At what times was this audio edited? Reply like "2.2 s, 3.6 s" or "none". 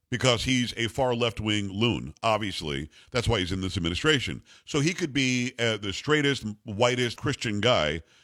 7.2 s